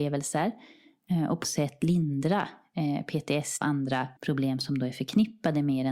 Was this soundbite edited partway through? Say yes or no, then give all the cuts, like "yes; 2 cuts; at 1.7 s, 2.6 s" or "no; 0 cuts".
yes; 3 cuts; at 1.4 s, 3.6 s, 4.2 s